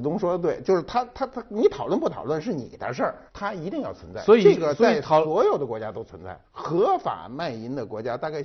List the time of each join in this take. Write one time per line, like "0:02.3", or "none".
0:03.3
0:06.4